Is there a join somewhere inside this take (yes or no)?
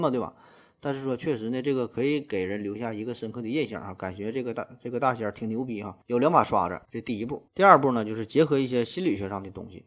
yes